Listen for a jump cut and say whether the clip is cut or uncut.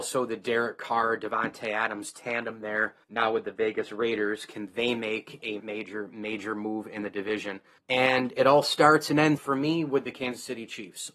cut